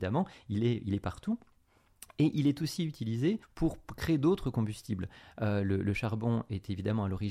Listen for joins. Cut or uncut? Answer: cut